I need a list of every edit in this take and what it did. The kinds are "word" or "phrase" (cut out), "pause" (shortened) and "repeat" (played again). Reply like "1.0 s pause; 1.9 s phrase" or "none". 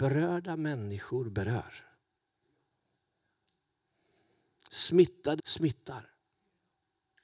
5.4 s word